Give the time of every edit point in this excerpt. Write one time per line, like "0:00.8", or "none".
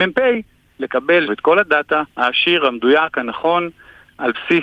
0:01.3
0:02.1